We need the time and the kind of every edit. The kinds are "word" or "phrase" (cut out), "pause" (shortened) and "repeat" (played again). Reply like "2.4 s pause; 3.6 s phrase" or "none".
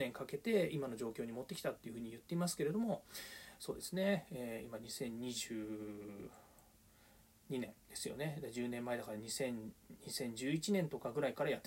7.8 s pause